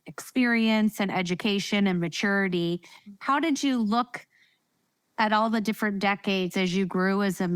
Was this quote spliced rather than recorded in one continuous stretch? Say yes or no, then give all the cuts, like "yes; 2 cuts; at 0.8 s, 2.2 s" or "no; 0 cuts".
no; 0 cuts